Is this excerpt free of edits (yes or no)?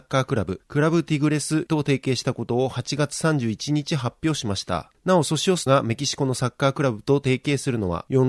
no